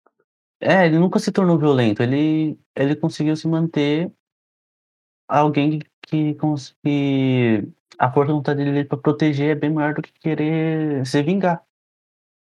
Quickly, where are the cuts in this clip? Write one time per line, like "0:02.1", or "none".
0:02.6